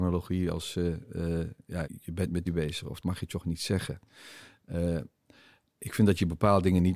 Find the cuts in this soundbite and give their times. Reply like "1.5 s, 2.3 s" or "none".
1.8 s, 2.5 s, 3.0 s